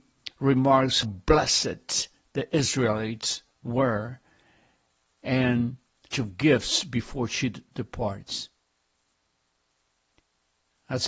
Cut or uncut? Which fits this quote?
cut